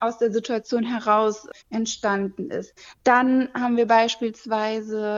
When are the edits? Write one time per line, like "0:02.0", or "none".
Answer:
0:01.6

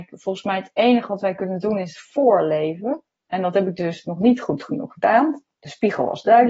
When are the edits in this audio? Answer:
none

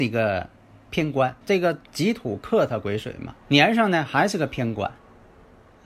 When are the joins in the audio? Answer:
0:01.4
0:01.9
0:03.4

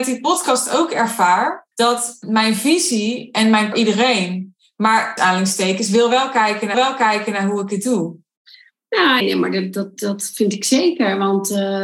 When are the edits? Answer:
0:01.7
0:03.7
0:05.2
0:06.7
0:09.2

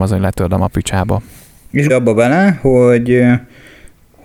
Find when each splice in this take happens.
0:01.9

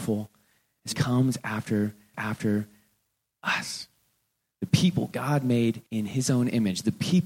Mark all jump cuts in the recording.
0:00.9
0:02.1
0:05.9

